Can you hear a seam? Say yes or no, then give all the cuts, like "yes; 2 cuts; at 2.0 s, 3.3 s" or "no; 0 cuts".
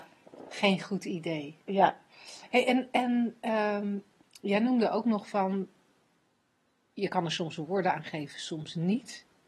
no; 0 cuts